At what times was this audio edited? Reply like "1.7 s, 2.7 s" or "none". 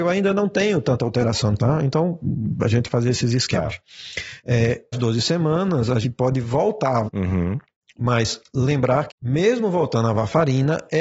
1.6 s, 2.9 s, 4.9 s, 6.0 s, 7.0 s, 9.1 s